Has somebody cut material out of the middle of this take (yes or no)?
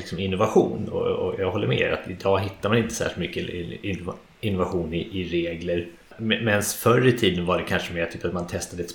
no